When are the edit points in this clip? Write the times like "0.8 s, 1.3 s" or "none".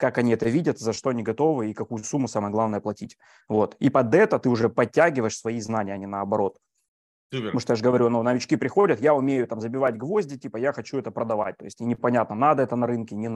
none